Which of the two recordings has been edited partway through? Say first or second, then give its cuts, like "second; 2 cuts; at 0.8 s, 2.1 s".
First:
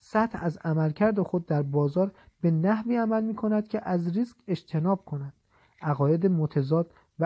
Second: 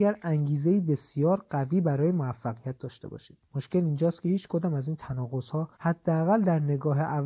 second; 2 cuts; at 3.4 s, 5.7 s